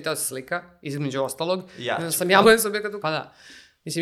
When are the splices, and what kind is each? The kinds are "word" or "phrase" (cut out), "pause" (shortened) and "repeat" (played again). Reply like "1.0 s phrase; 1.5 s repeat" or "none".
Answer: 2.4 s word; 3.0 s word